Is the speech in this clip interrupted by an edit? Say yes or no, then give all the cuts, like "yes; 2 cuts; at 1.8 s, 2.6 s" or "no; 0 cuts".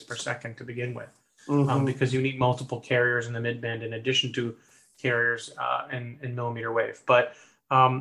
no; 0 cuts